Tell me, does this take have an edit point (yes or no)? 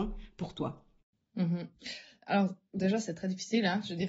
no